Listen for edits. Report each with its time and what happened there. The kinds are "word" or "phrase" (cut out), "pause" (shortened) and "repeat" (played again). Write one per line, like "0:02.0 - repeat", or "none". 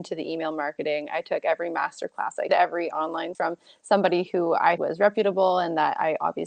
0:02.5 - word
0:03.3 - word
0:04.8 - word